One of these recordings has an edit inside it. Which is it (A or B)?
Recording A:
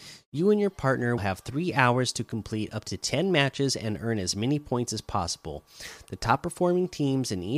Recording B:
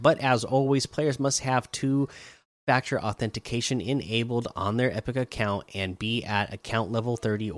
A